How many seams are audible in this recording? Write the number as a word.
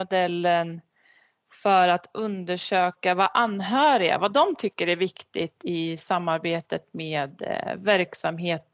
zero